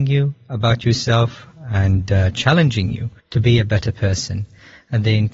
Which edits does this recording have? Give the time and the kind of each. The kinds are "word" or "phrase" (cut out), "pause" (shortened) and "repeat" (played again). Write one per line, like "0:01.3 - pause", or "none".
0:03.2 - pause